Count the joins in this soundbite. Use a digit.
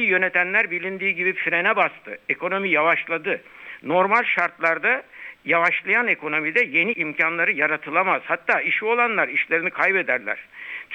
2